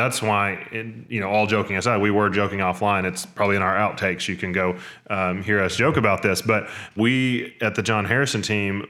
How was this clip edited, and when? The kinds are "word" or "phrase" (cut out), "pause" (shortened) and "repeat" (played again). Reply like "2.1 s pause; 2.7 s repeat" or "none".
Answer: 7.0 s word